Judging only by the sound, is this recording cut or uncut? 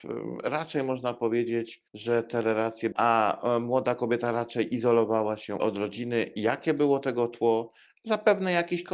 cut